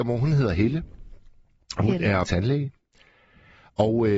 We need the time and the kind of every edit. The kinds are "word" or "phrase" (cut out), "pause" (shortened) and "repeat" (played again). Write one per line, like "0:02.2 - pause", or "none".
0:02.2 - word

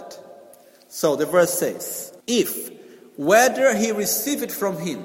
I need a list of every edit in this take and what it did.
0:02.2 - pause

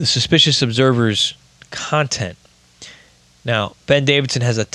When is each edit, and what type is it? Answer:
none

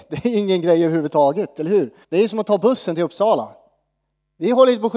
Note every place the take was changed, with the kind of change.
0:02.0 - pause

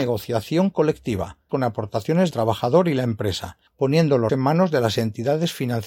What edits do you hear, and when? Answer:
0:01.5 - word
0:02.3 - word
0:03.7 - pause
0:04.3 - word

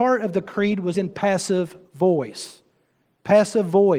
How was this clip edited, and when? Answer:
0:00.9 - word

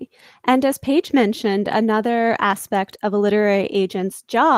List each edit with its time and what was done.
none

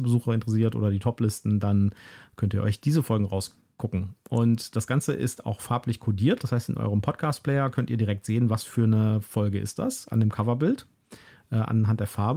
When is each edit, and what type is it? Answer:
none

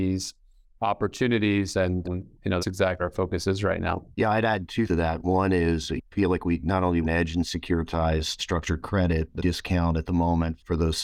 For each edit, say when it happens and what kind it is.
0:02.0 - word
0:02.6 - word
0:03.0 - word
0:04.1 - pause
0:04.9 - word
0:07.0 - phrase
0:08.4 - word
0:09.4 - word

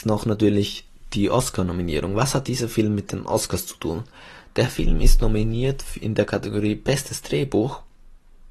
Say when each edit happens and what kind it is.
none

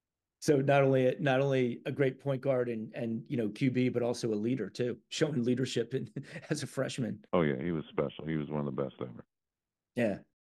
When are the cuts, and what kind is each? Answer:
0:07.3 - pause

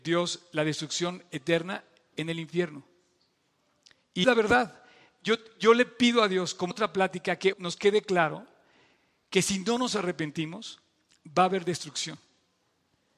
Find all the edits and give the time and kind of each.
0:04.2 - word
0:06.7 - word
0:07.5 - word

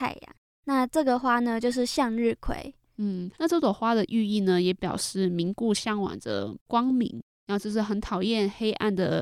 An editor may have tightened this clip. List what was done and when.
0:03.3 - pause

